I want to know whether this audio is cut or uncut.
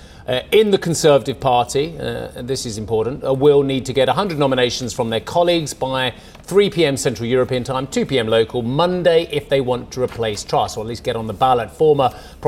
uncut